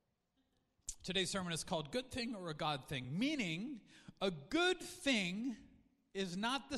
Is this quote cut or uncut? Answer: uncut